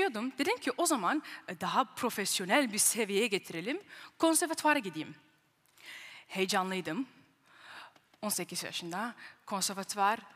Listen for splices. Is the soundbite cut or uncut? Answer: uncut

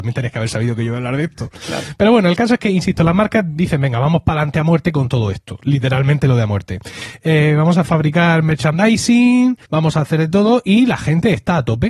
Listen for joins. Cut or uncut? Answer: cut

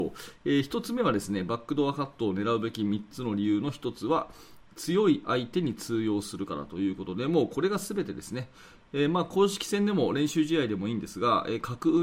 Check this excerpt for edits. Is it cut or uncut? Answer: uncut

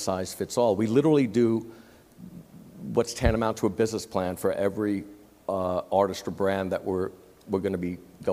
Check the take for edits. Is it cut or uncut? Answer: uncut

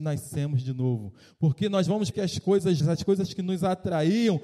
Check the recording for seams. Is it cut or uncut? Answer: cut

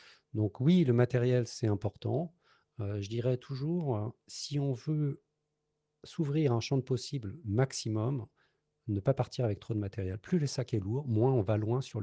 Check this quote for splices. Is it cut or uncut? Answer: uncut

